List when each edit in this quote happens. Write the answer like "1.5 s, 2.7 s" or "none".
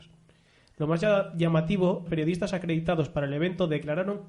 2.1 s